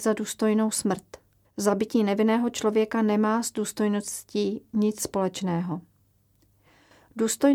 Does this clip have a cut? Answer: yes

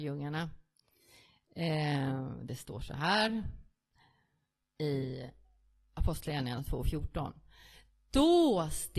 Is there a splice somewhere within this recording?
no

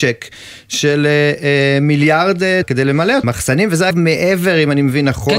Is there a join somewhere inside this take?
yes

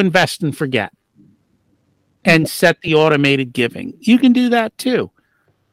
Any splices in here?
no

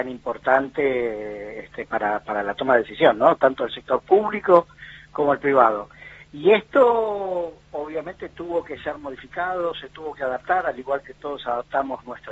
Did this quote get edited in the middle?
no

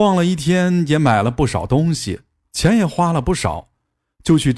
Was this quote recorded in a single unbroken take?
yes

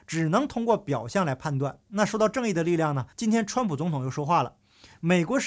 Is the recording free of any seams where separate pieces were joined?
no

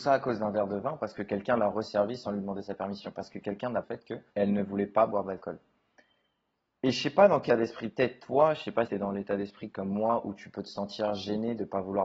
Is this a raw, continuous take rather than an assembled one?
no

